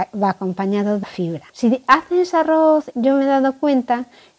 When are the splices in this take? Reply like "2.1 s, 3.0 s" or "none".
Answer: 1.0 s, 1.5 s, 2.9 s